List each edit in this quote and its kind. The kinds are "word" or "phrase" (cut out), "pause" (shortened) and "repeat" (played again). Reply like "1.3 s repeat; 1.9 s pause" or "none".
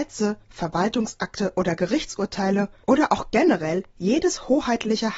none